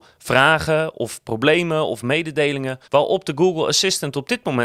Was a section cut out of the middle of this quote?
yes; 1 cut; at 2.8 s

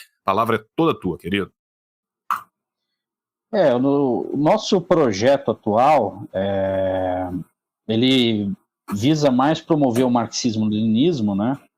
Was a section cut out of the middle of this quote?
no; 0 cuts

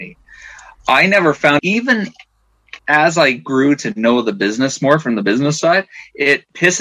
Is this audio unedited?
no; 2 cuts; at 1.6 s, 2.8 s

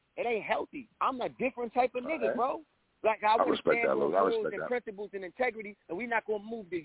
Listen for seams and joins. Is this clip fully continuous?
no; 3 cuts; at 0.9 s, 2.9 s, 5.8 s

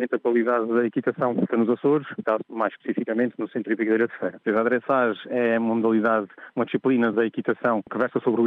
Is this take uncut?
no; 3 cuts; at 1.5 s, 2.2 s, 7.1 s

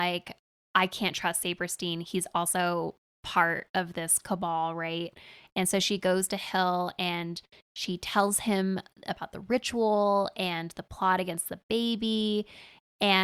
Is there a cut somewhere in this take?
no; 0 cuts

